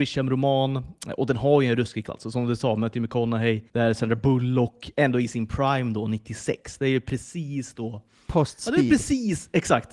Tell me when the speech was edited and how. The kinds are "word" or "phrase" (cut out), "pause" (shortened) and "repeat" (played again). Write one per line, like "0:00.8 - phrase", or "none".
0:02.0 - word
0:03.7 - pause